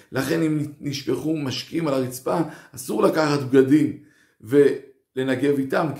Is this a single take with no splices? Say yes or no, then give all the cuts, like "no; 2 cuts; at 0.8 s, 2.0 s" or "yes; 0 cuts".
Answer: yes; 0 cuts